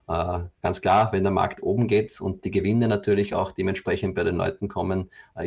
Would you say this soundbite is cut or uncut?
uncut